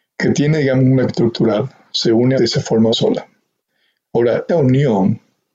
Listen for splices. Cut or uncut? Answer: cut